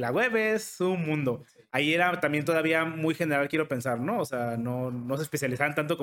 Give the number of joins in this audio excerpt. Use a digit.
0